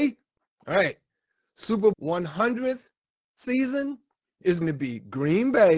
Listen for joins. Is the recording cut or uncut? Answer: cut